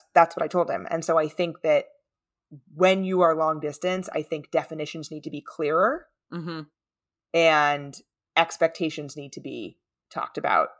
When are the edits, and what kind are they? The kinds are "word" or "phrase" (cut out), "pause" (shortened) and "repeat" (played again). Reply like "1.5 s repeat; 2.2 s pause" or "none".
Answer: none